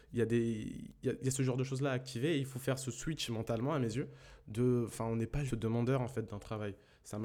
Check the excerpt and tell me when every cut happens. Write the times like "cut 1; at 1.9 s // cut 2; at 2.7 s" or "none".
cut 1; at 5.5 s